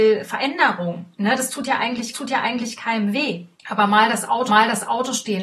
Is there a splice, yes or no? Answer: yes